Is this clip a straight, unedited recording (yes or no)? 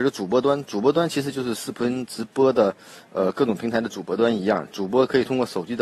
yes